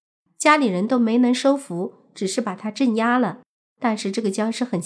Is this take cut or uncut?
uncut